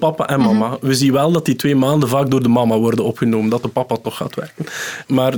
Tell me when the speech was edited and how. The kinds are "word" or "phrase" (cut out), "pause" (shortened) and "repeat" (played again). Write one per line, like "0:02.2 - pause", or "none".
none